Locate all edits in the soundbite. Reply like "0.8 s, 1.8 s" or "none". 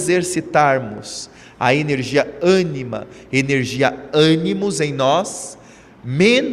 none